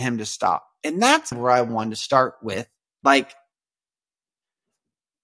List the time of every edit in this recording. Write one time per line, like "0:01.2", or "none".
0:01.3
0:02.9